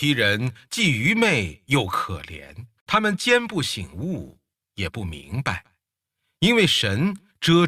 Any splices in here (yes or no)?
yes